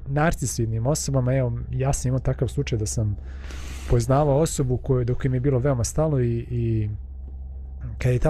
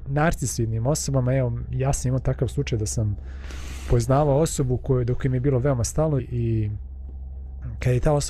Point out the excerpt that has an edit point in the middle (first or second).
second